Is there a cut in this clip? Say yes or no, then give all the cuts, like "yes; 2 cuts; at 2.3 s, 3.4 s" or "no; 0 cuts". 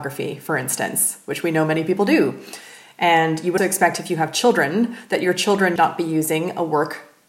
yes; 2 cuts; at 3.6 s, 5.8 s